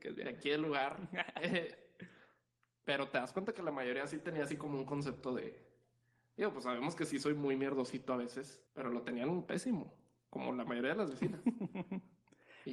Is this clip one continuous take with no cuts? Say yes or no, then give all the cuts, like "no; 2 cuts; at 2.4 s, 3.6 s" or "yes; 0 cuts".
no; 1 cut; at 8.7 s